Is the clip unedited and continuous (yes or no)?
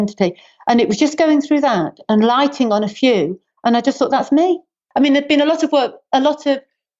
yes